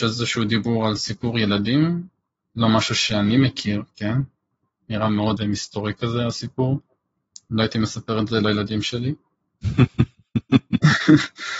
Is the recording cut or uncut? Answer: cut